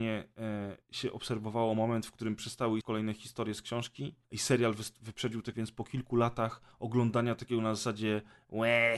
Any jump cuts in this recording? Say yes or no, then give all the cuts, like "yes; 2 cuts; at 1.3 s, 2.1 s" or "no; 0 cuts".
yes; 3 cuts; at 2.8 s, 4.2 s, 5.5 s